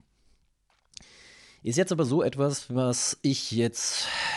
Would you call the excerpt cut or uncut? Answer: uncut